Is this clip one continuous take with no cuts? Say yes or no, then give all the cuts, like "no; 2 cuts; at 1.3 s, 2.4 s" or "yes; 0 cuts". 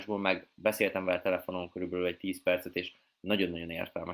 yes; 0 cuts